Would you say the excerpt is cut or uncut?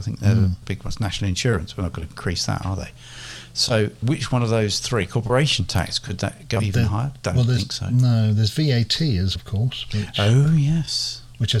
cut